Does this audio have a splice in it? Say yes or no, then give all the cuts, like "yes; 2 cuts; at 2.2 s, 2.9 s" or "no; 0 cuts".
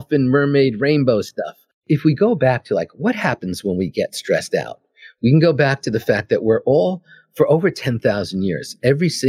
no; 0 cuts